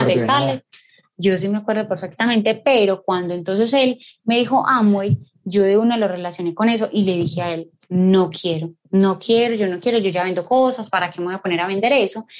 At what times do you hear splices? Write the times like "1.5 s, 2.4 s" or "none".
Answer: none